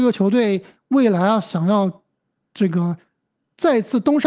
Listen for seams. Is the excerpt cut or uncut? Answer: uncut